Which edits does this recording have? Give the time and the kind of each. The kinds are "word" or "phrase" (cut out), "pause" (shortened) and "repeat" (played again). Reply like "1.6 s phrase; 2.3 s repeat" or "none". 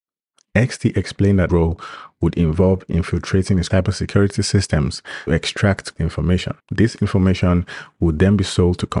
1.5 s word; 3.7 s word; 5.3 s word; 6.0 s word; 6.6 s pause